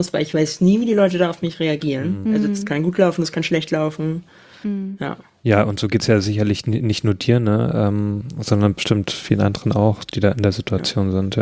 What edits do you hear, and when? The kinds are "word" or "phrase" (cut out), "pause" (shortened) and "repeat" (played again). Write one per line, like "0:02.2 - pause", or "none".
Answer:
none